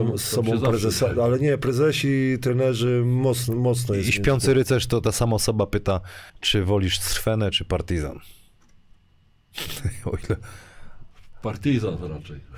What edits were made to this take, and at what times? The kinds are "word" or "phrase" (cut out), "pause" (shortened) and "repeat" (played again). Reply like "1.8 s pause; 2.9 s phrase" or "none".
6.3 s pause